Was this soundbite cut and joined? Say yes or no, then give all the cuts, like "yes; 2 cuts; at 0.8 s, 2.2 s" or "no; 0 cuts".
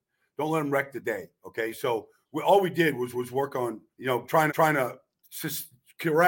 yes; 3 cuts; at 3.1 s, 3.9 s, 4.5 s